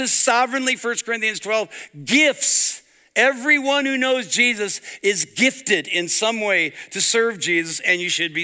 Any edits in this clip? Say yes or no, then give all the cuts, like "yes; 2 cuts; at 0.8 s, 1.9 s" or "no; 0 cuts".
no; 0 cuts